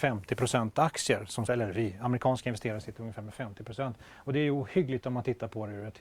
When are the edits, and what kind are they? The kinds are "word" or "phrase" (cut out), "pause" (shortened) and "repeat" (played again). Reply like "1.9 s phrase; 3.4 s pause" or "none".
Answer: 1.5 s word; 5.0 s word